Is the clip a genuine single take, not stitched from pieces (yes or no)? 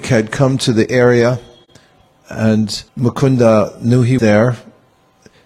no